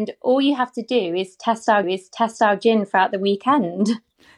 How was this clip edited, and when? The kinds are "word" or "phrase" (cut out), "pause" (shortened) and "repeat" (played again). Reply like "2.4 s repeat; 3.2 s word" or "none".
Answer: 1.8 s repeat